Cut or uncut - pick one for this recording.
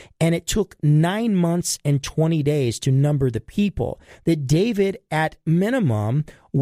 uncut